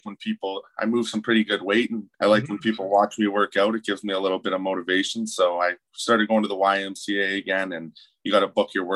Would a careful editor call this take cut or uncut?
cut